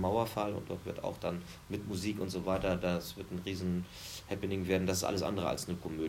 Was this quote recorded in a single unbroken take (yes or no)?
yes